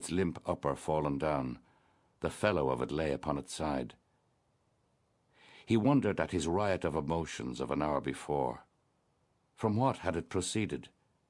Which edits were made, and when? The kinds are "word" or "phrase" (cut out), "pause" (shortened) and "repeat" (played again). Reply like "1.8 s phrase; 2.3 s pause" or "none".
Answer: none